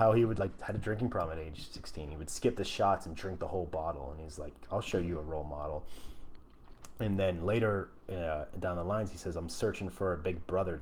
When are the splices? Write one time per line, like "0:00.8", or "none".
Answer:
none